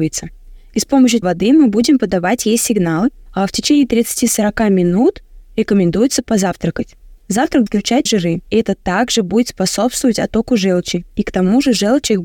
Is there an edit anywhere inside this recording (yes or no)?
yes